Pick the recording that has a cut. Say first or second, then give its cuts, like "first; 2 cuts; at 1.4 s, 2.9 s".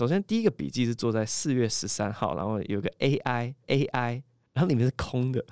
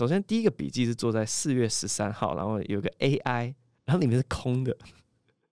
first; 1 cut; at 3.6 s